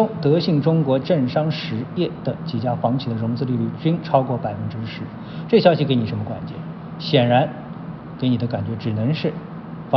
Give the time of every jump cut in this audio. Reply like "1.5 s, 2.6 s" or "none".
1.0 s, 8.2 s